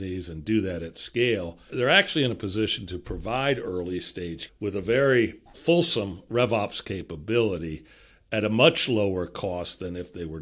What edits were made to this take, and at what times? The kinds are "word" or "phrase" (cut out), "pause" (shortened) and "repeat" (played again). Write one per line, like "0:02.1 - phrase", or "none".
0:01.7 - word
0:04.5 - word
0:05.5 - word